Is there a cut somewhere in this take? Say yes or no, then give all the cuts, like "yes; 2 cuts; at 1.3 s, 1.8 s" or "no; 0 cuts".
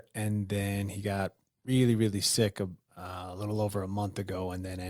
no; 0 cuts